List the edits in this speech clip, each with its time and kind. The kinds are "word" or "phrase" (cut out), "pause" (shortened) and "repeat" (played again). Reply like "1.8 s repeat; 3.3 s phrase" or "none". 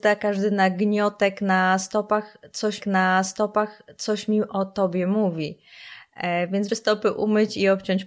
2.8 s repeat; 6.7 s word